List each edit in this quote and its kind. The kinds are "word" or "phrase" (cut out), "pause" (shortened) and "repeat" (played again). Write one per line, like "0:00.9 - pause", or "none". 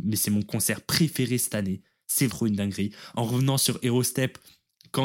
0:02.3 - word